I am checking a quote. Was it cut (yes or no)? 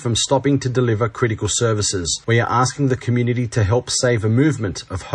no